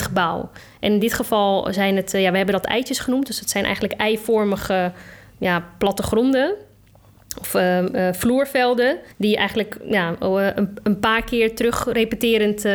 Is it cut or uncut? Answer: cut